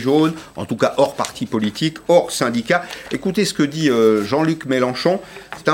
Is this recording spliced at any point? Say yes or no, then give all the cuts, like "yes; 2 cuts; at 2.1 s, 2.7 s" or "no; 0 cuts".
no; 0 cuts